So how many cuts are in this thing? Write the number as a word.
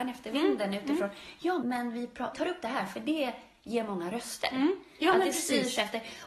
two